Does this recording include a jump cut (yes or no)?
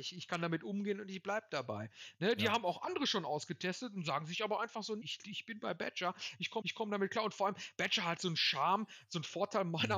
yes